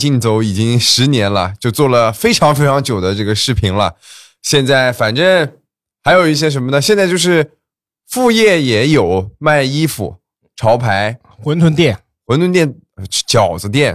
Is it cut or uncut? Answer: uncut